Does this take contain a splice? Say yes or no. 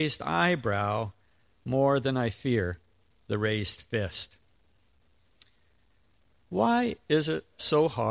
no